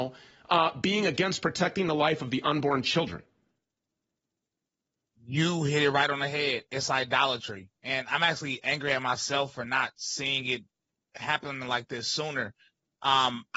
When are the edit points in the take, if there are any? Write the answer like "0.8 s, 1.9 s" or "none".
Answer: none